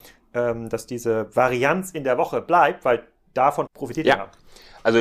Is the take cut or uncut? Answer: cut